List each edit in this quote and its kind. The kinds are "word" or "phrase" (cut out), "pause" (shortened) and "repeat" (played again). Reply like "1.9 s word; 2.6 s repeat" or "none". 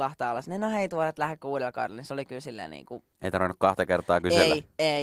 3.1 s pause